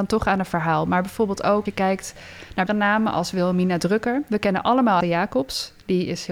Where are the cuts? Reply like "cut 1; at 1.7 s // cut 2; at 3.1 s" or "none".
cut 1; at 1.7 s // cut 2; at 2.7 s // cut 3; at 5.0 s